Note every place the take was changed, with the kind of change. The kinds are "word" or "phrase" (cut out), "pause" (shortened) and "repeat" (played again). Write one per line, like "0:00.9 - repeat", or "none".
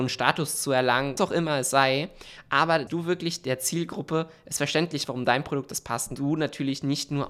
0:01.2 - word
0:02.9 - word
0:05.1 - word
0:06.2 - phrase